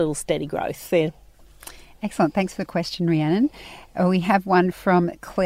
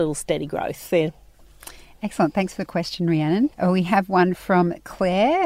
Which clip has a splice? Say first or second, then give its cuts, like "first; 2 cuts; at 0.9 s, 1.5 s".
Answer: second; 1 cut; at 3.5 s